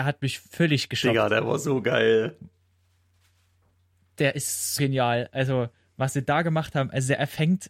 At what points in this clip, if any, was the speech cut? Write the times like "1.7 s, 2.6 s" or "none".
4.8 s